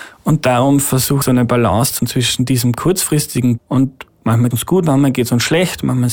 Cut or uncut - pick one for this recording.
cut